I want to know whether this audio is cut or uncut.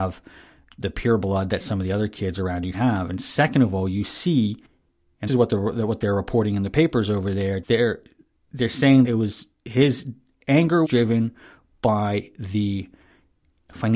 cut